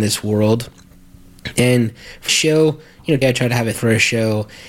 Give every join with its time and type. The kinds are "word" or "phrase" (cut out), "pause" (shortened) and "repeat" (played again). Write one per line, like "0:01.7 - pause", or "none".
0:02.3 - word
0:03.2 - word
0:03.7 - word